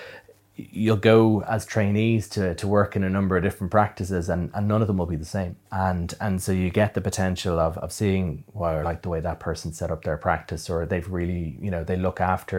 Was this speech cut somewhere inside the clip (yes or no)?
yes